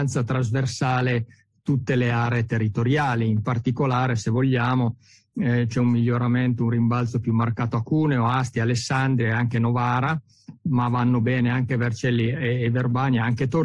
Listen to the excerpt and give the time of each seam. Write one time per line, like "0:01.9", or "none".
none